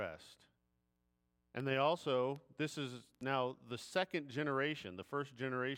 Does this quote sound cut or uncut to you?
uncut